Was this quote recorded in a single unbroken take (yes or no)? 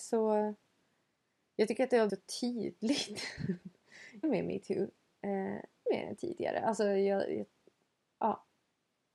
no